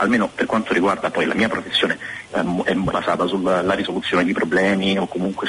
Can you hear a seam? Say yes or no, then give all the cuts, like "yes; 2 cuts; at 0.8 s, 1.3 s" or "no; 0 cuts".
yes; 2 cuts; at 2.3 s, 2.9 s